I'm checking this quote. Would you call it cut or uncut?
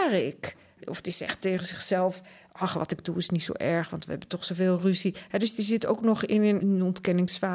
uncut